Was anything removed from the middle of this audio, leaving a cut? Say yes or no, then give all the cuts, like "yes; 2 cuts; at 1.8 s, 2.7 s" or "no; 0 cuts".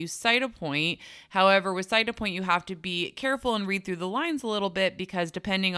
no; 0 cuts